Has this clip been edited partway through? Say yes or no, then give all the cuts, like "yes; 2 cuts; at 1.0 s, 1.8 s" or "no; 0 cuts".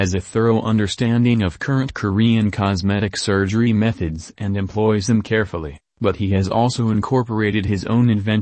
no; 0 cuts